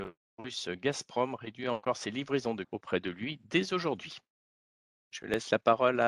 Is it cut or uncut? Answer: cut